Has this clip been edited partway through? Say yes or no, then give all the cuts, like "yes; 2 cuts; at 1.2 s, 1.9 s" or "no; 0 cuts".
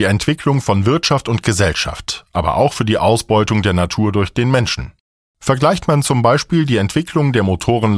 no; 0 cuts